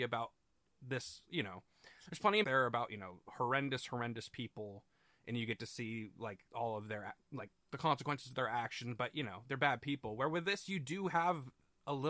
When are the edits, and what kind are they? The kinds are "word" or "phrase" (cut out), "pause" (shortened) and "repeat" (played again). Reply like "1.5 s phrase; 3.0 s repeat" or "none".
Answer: 2.4 s phrase; 6.5 s pause; 7.2 s pause